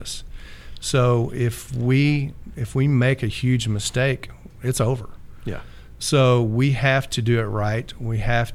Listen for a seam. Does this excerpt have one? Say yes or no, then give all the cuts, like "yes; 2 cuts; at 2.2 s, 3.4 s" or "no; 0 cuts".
no; 0 cuts